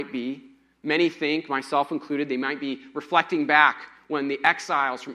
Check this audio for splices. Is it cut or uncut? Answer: uncut